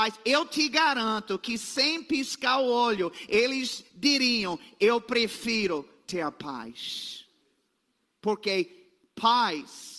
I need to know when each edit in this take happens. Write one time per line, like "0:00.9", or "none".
none